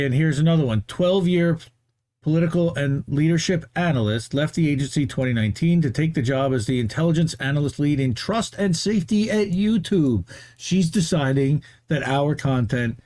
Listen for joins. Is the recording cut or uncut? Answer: uncut